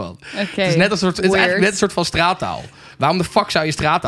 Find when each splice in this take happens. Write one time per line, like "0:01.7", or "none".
none